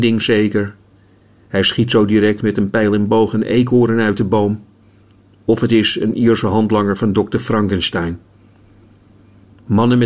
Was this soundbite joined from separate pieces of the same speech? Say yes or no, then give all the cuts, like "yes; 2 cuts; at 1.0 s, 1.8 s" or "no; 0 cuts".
no; 0 cuts